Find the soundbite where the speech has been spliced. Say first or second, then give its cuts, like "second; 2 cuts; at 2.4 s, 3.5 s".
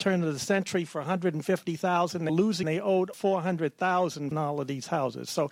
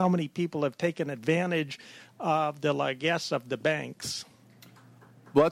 first; 4 cuts; at 2.3 s, 2.6 s, 3.1 s, 4.3 s